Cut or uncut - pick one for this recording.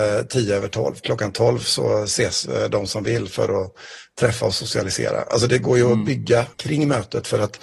cut